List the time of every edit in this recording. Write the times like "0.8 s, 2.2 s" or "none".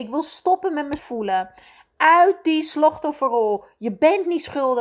1.0 s